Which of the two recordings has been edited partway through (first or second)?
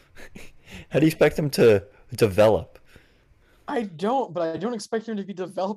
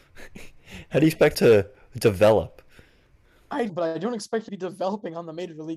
second